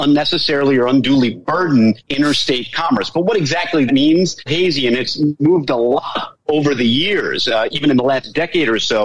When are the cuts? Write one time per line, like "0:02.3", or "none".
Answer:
0:02.0
0:03.9
0:04.5
0:06.4